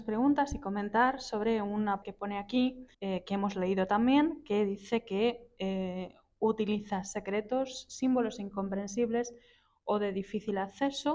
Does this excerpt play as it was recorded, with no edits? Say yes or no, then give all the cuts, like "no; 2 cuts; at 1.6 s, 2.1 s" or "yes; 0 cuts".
no; 2 cuts; at 2.0 s, 2.9 s